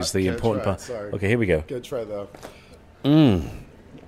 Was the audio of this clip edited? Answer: no; 0 cuts

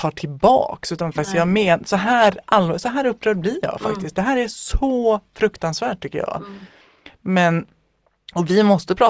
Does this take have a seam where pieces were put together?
no; 0 cuts

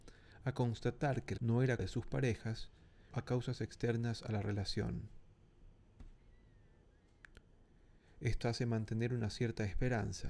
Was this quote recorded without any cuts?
no; 4 cuts; at 1.4 s, 1.8 s, 3.1 s, 8.4 s

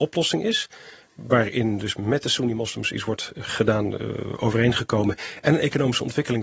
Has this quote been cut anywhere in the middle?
no; 0 cuts

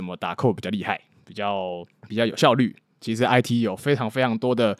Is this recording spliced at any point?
no; 0 cuts

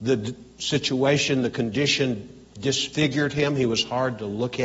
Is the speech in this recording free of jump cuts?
yes; 0 cuts

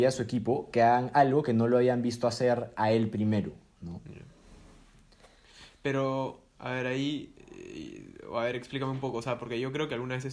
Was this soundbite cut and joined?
no; 0 cuts

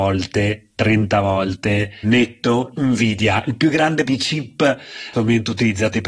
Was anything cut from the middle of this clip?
yes; 4 cuts; at 2.0 s, 2.7 s, 4.1 s, 5.1 s

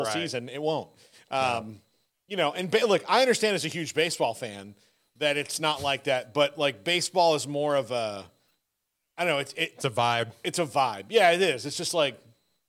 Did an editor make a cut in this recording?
no; 0 cuts

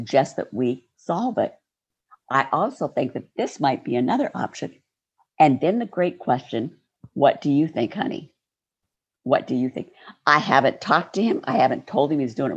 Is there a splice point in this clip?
no; 0 cuts

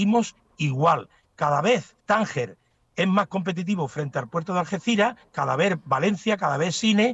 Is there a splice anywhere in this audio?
yes; 1 cut; at 2.0 s

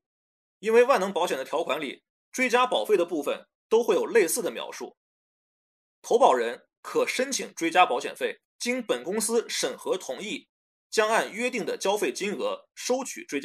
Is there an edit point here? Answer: yes; 1 cut; at 8.5 s

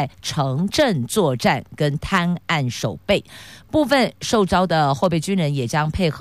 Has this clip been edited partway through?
no; 0 cuts

